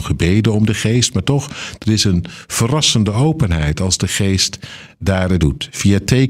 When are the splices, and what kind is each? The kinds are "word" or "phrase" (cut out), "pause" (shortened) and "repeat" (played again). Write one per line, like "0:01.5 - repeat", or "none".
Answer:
0:05.4 - word